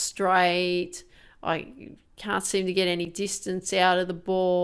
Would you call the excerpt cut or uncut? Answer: uncut